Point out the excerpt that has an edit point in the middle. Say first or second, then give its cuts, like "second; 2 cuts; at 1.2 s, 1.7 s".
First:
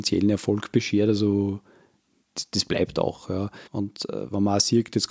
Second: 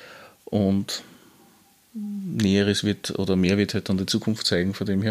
first; 1 cut; at 3.7 s